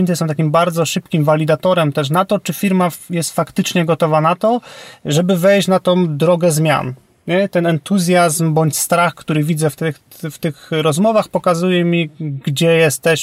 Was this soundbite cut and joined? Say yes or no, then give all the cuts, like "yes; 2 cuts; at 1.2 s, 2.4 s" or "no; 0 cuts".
no; 0 cuts